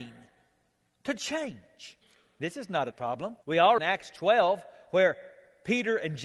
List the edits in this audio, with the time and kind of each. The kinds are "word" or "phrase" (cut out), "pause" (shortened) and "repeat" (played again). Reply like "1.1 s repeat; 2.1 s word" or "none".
2.0 s pause; 2.9 s word; 3.4 s pause; 3.8 s phrase